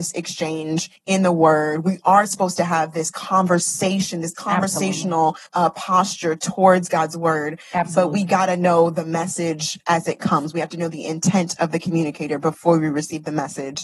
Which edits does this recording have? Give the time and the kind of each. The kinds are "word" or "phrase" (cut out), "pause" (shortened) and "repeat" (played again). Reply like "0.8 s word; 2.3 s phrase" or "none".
1.0 s pause; 5.5 s pause